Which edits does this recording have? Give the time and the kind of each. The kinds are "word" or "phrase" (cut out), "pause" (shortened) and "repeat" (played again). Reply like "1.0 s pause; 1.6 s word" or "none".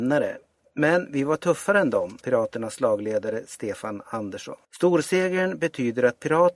2.2 s word; 4.6 s pause